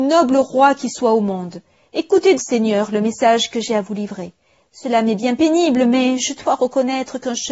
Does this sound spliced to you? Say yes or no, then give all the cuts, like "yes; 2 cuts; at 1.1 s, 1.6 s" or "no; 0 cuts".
yes; 1 cut; at 2.4 s